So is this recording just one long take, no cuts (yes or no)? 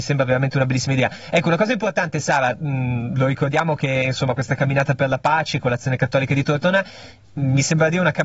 yes